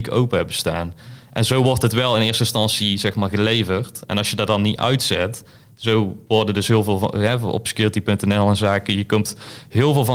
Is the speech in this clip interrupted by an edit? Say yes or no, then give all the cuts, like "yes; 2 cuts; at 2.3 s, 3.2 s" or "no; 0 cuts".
no; 0 cuts